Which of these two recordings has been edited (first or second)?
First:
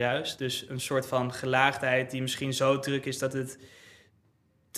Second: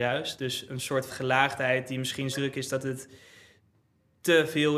second